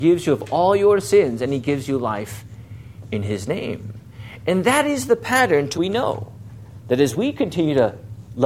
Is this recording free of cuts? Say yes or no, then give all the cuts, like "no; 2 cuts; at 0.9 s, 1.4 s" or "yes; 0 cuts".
no; 1 cut; at 5.7 s